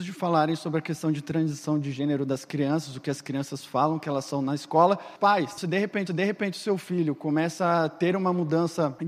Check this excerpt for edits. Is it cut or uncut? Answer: cut